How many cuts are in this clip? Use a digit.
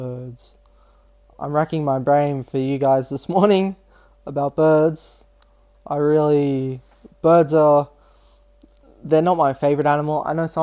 0